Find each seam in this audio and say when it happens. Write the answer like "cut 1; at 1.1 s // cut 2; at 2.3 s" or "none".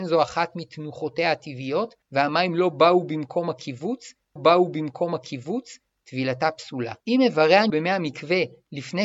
cut 1; at 2.0 s // cut 2; at 4.4 s // cut 3; at 7.0 s // cut 4; at 7.7 s